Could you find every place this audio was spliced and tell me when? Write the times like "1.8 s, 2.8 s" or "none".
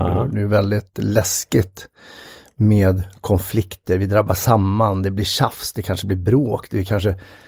none

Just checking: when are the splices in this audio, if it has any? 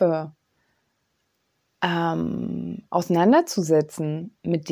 none

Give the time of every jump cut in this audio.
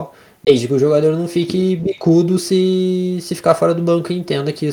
none

